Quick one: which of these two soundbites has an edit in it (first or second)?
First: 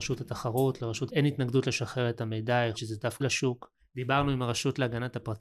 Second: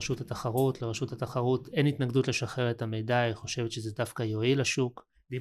first